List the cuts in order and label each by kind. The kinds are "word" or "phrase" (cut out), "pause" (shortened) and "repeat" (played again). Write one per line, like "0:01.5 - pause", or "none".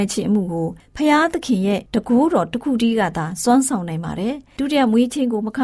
0:01.9 - pause